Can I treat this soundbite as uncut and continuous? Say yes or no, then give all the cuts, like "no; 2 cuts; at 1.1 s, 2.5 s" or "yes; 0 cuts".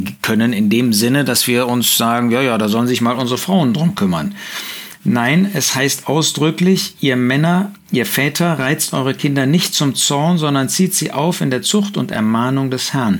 yes; 0 cuts